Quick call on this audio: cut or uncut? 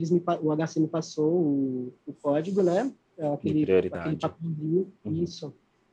cut